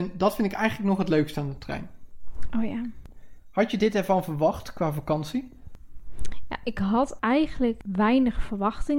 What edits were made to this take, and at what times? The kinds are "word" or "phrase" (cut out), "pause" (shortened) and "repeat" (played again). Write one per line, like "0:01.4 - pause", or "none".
none